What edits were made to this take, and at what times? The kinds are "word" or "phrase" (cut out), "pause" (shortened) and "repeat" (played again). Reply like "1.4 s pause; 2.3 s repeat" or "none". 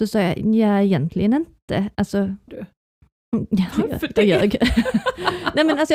2.5 s word